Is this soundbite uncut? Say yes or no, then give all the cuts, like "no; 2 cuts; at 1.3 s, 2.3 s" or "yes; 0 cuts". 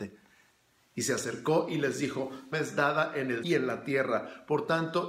no; 2 cuts; at 2.5 s, 3.4 s